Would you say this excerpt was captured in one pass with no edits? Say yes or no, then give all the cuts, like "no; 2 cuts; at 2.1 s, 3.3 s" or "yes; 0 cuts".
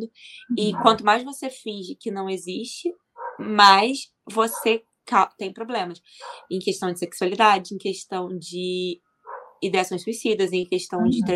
yes; 0 cuts